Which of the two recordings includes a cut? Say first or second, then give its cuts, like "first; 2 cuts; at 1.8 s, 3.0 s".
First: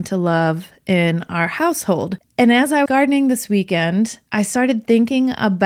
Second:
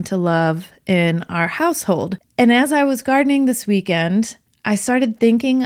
first; 2 cuts; at 2.9 s, 4.3 s